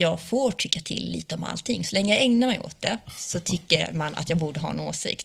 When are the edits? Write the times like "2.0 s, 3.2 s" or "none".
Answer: none